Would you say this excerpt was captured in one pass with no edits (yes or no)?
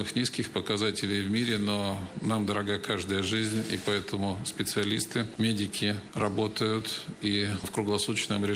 yes